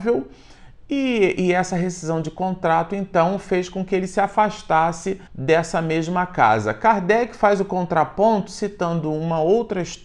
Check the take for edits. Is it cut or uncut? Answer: cut